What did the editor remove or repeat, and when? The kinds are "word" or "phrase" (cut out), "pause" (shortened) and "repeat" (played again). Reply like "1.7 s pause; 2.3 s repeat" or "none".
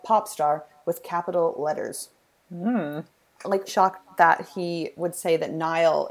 2.3 s pause; 3.7 s phrase